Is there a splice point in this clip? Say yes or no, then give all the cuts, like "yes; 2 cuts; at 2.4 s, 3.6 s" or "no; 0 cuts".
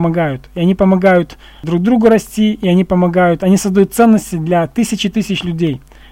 no; 0 cuts